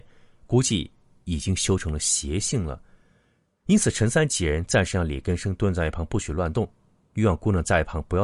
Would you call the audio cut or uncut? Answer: uncut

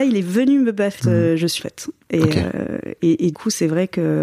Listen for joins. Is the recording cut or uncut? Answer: cut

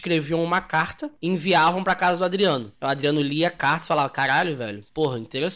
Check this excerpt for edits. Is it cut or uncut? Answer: uncut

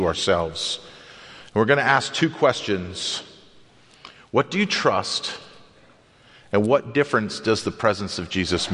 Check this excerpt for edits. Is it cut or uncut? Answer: uncut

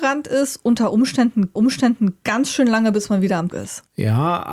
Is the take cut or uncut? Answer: cut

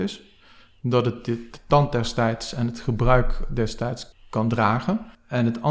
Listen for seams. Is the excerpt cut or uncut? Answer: cut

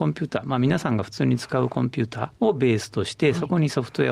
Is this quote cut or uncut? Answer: uncut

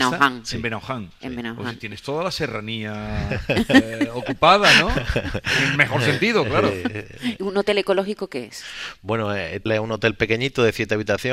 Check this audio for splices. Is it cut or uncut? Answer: cut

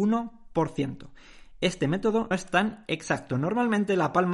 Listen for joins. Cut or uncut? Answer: cut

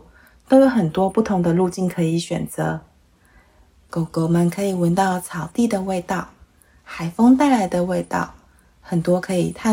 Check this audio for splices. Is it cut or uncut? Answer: uncut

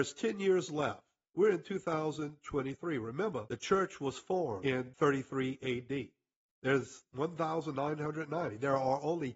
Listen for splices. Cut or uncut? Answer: uncut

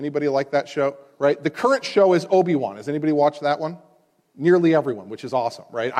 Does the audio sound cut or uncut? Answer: uncut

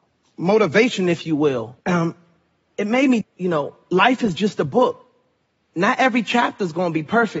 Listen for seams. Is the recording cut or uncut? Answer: cut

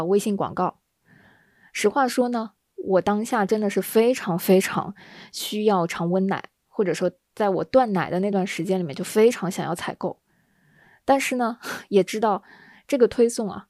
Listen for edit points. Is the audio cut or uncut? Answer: uncut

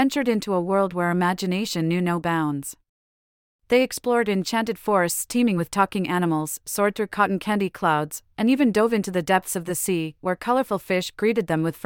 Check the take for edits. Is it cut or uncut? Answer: uncut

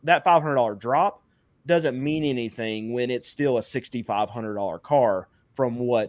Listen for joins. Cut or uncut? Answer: uncut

